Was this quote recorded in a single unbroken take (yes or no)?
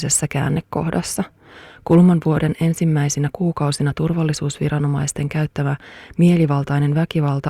yes